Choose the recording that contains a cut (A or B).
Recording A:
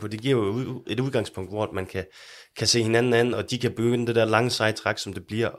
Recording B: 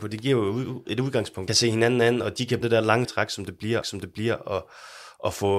B